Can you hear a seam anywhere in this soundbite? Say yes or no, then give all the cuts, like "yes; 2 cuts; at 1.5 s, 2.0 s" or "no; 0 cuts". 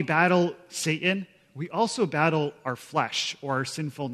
no; 0 cuts